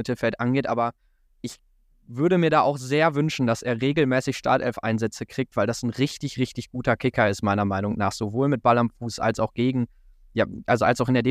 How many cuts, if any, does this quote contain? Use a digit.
0